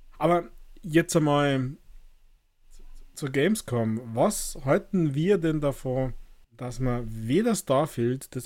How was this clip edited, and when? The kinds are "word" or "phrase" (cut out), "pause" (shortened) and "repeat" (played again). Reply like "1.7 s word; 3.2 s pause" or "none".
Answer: 6.4 s pause